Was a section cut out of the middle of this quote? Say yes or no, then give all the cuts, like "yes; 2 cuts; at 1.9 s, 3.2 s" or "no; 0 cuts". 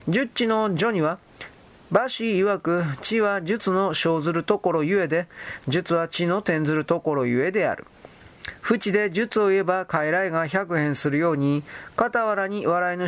no; 0 cuts